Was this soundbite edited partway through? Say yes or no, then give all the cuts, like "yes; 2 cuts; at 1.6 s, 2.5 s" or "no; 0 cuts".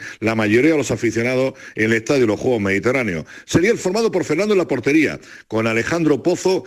no; 0 cuts